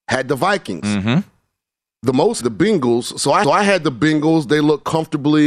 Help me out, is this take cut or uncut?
cut